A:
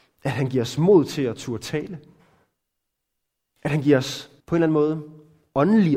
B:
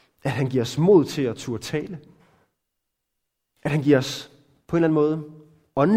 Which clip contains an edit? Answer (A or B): A